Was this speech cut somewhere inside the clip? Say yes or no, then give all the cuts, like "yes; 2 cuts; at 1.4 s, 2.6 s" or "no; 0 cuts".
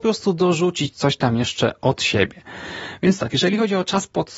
no; 0 cuts